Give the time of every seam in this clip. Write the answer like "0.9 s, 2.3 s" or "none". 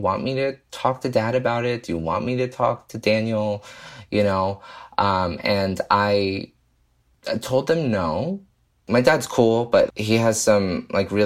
9.9 s